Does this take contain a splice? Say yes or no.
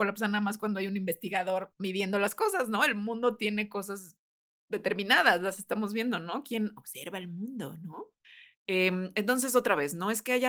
no